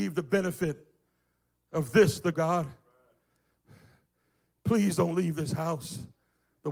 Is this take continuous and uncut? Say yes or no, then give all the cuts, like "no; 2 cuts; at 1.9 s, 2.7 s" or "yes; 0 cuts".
no; 1 cut; at 2.3 s